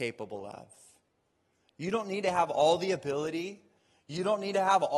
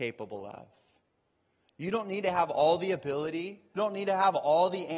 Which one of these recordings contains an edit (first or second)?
second